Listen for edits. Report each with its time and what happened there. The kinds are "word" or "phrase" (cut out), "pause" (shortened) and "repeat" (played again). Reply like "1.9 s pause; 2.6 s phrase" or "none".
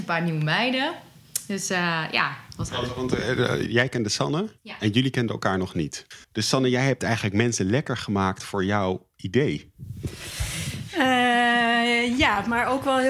4.6 s pause; 6.2 s pause